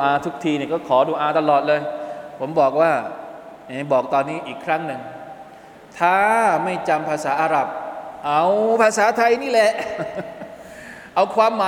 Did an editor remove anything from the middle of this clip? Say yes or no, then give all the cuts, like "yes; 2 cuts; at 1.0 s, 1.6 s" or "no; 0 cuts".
no; 0 cuts